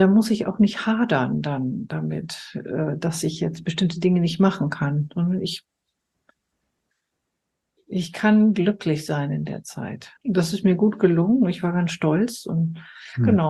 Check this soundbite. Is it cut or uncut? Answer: cut